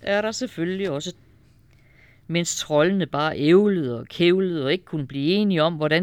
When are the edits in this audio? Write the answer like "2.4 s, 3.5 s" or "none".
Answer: 1.1 s